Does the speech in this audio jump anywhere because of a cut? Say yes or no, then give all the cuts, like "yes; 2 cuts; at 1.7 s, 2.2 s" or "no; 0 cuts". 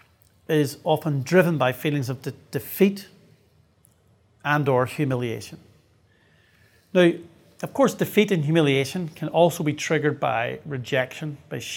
no; 0 cuts